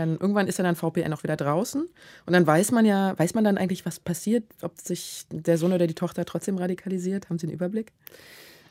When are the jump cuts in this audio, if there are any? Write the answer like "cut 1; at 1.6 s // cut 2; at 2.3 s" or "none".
none